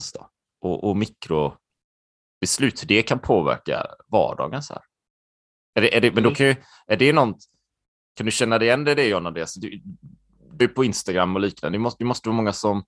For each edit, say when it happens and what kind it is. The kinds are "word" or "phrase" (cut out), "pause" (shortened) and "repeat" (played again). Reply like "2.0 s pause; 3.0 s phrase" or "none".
10.6 s word